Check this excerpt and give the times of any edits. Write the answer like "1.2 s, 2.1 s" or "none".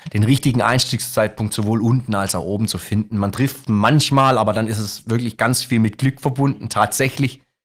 none